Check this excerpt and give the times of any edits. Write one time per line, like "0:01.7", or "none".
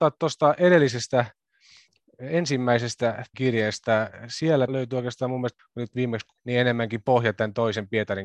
0:03.3
0:04.7
0:05.6
0:06.4